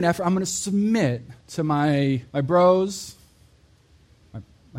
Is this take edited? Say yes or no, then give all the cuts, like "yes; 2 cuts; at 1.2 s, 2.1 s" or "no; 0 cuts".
yes; 2 cuts; at 1.4 s, 2.3 s